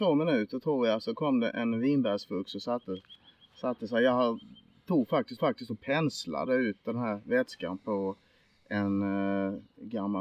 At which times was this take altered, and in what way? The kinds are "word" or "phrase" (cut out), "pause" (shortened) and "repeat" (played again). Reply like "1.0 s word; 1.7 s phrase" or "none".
5.4 s repeat